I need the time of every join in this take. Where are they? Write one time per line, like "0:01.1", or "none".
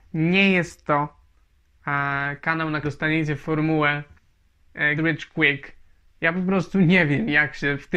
0:02.8
0:05.0